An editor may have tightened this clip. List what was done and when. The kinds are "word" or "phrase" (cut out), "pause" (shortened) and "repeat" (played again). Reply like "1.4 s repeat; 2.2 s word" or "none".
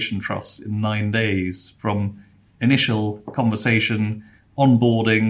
none

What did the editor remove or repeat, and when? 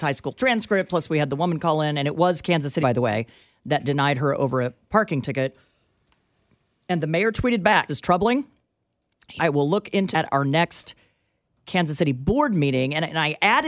2.8 s word; 7.9 s word; 9.4 s word; 10.1 s word

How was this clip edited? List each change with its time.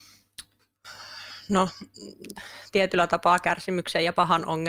none

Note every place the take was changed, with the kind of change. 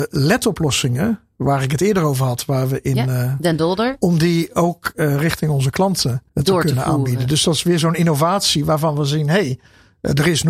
6.3 s pause

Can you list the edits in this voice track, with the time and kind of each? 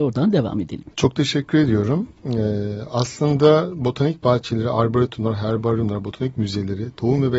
0.9 s pause

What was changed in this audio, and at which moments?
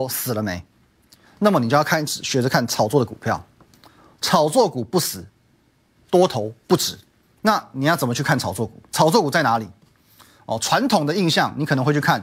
7.2 s pause

